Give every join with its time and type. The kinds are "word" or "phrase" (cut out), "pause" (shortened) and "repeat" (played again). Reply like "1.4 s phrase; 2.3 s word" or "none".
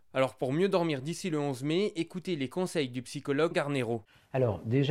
3.5 s word

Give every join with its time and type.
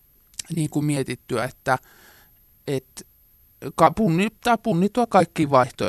none

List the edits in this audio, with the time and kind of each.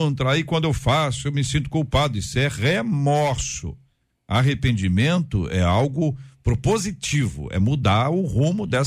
none

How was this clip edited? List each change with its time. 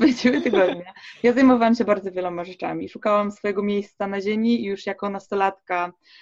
none

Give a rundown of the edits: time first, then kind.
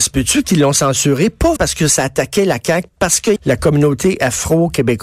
1.6 s word; 2.9 s phrase; 3.4 s phrase

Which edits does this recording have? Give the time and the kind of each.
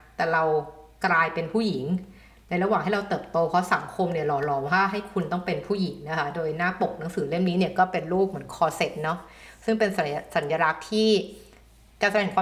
none

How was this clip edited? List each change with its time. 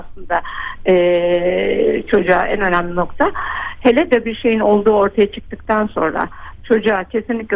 4.2 s word

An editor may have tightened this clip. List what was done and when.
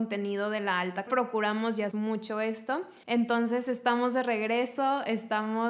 1.1 s phrase; 1.9 s phrase; 3.0 s pause

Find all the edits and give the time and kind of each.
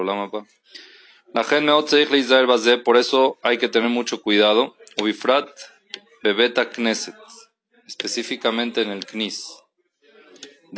none

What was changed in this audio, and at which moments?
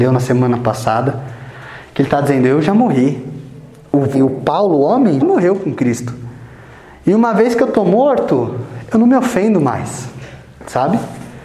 4.1 s word; 5.2 s word

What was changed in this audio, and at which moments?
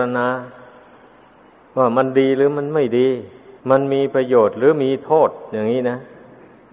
3.6 s pause

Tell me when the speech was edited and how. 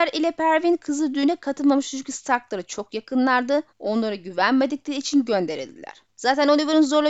3.7 s pause; 6.1 s pause

